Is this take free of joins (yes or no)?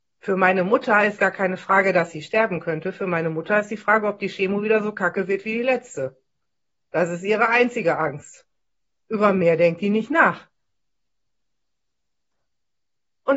no